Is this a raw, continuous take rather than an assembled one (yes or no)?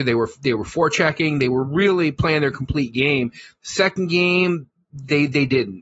yes